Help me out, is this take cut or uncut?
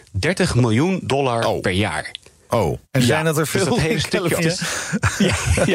cut